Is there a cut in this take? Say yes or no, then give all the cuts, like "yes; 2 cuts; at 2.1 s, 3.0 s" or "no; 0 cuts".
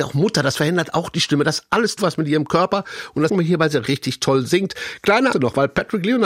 yes; 4 cuts; at 2.0 s, 3.3 s, 3.8 s, 5.3 s